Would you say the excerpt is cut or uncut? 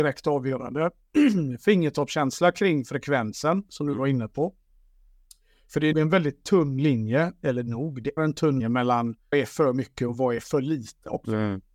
cut